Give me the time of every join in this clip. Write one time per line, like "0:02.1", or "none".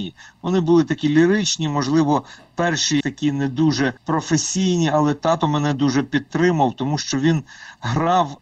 0:03.0
0:04.0

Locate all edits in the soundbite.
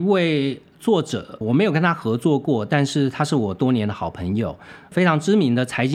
0:01.4
0:04.9

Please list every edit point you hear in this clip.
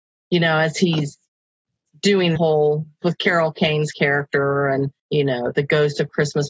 0:02.4
0:03.0
0:05.0

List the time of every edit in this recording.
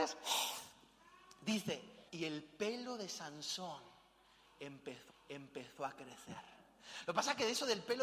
0:02.1
0:05.1

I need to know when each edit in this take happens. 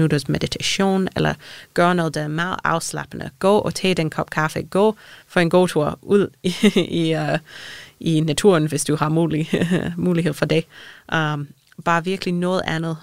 0:05.2

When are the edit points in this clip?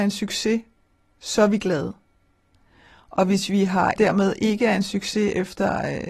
0:04.0

